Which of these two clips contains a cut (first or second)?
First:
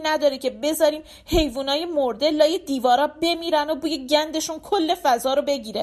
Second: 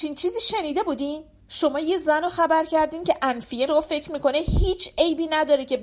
second